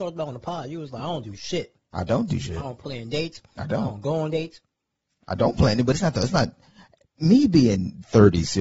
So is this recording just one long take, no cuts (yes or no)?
yes